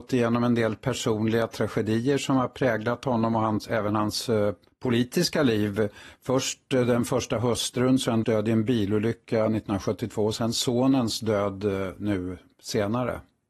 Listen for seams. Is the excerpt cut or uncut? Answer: cut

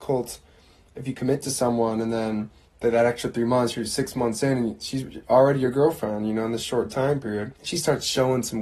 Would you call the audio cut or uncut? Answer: cut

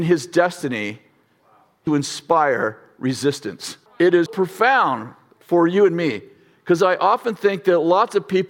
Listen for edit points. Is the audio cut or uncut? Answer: cut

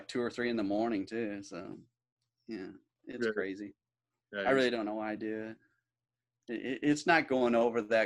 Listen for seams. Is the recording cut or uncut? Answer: uncut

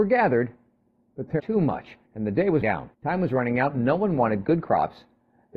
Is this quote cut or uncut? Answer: cut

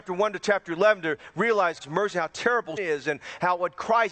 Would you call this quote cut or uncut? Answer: cut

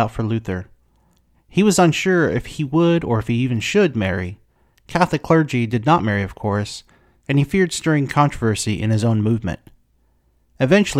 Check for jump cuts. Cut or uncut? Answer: uncut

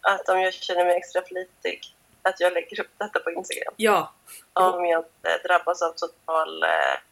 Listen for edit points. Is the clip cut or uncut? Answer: uncut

